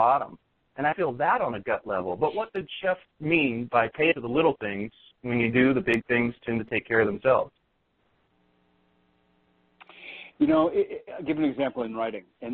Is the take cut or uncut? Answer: cut